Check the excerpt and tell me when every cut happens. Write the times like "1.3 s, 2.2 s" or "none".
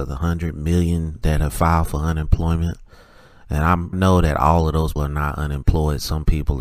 1.2 s, 3.9 s, 5.0 s